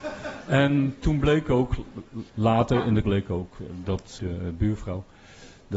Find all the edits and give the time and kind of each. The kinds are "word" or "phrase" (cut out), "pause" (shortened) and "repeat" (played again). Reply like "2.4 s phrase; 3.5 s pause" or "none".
2.3 s word; 3.0 s word; 4.2 s word